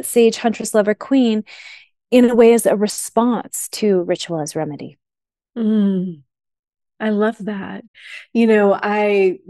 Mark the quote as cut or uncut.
uncut